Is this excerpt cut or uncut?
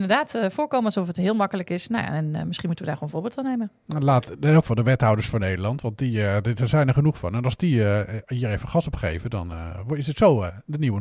uncut